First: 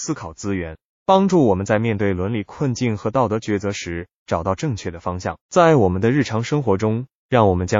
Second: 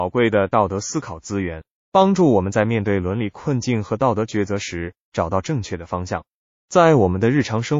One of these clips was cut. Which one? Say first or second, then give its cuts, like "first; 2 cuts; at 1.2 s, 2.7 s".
first; 1 cut; at 5.4 s